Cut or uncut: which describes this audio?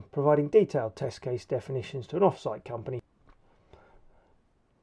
uncut